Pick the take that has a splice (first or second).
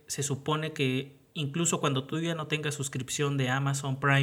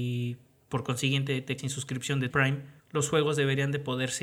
second